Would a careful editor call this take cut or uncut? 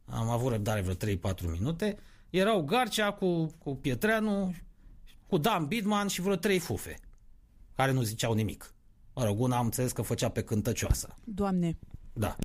cut